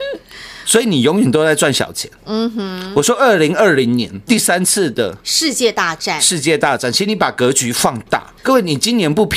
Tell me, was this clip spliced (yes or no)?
yes